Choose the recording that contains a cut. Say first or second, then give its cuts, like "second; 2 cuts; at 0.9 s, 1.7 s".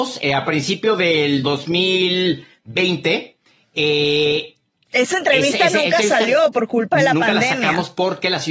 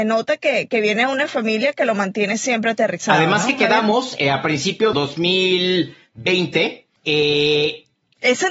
second; 2 cuts; at 4.9 s, 7.0 s